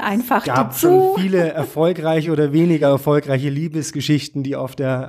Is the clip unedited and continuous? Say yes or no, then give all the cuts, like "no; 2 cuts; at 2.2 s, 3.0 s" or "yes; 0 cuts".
yes; 0 cuts